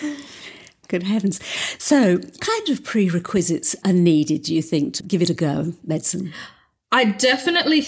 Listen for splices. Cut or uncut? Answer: cut